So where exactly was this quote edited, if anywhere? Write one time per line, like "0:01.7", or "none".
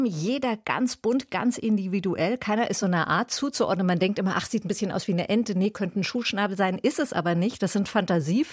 none